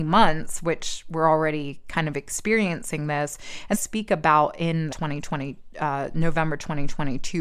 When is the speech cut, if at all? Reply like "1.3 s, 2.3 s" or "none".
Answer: 3.7 s, 4.9 s